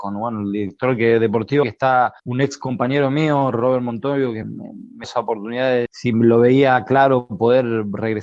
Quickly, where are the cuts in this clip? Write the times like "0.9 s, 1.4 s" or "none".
1.6 s, 2.2 s, 4.4 s, 5.0 s, 5.9 s